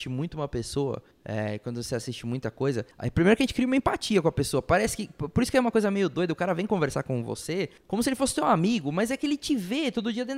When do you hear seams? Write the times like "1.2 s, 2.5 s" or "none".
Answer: 1.1 s, 2.9 s, 7.8 s